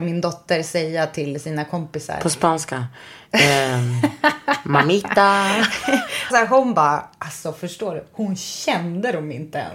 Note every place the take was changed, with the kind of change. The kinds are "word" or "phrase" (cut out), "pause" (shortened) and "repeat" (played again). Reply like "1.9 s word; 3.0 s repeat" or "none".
6.3 s phrase

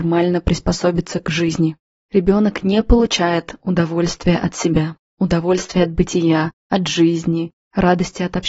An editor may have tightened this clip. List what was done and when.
none

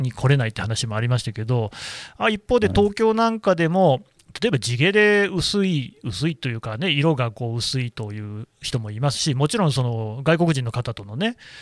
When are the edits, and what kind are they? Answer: none

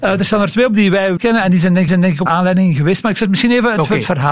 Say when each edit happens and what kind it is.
1.2 s word; 1.9 s repeat; 2.3 s word

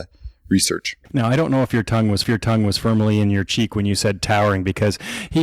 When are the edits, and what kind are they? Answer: 1.0 s pause; 2.2 s repeat

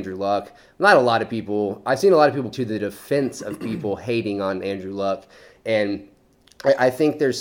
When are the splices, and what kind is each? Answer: 2.5 s word

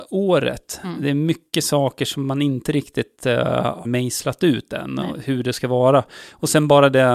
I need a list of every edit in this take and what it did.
3.8 s word

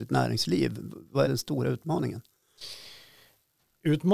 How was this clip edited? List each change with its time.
1.2 s word

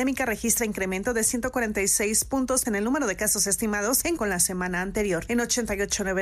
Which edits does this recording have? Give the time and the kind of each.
2.6 s word; 4.2 s word

